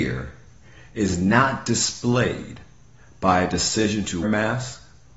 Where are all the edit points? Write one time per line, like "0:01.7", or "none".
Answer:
0:04.2